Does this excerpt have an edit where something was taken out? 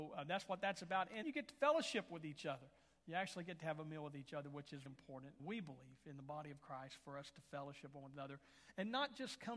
yes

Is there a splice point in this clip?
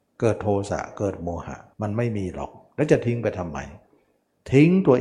yes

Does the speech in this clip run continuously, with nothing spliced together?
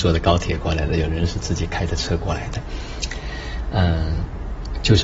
yes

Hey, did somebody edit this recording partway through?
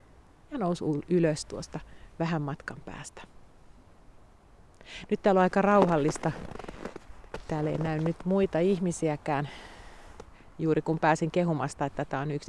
no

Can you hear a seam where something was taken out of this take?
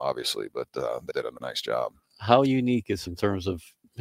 yes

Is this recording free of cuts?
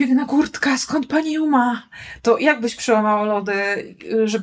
yes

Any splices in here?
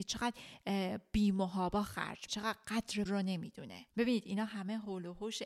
yes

